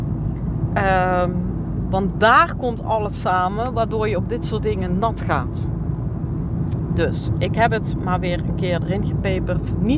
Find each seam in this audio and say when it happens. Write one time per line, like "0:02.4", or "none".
none